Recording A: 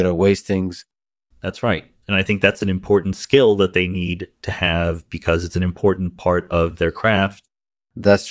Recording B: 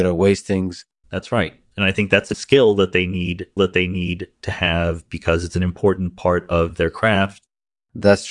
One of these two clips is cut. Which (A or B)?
B